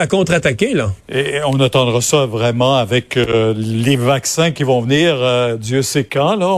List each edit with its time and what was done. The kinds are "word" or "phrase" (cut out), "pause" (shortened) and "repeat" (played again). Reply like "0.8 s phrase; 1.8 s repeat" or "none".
1.0 s pause